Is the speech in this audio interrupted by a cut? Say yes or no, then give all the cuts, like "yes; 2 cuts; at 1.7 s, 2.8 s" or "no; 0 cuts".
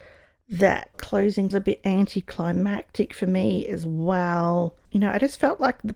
yes; 3 cuts; at 0.9 s, 1.5 s, 4.8 s